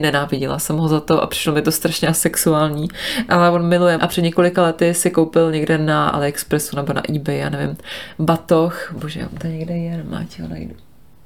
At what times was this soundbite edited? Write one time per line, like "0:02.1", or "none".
0:04.0